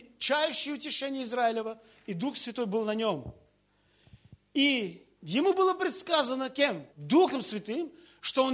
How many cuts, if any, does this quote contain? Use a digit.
2